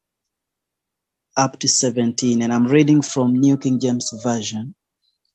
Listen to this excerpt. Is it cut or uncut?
uncut